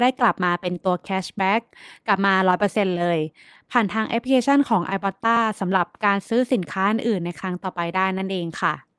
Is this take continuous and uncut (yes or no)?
yes